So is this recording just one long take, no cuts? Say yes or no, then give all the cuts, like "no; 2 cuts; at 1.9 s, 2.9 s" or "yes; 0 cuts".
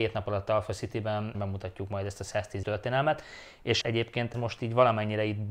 no; 4 cuts; at 1.3 s, 2.6 s, 3.8 s, 4.3 s